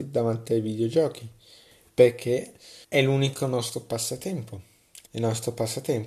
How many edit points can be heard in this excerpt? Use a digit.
2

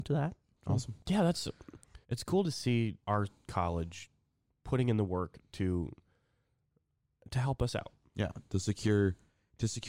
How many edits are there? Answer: 4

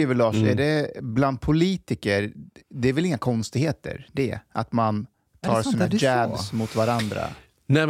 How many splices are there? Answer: 0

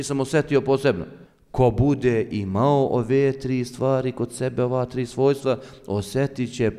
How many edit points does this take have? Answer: 1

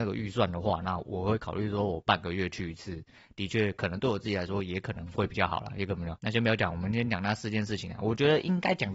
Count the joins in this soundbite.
1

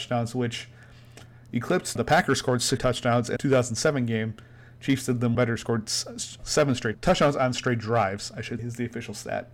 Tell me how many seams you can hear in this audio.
8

